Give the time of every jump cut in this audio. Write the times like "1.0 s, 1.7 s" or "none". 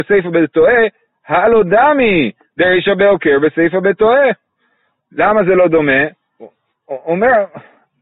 none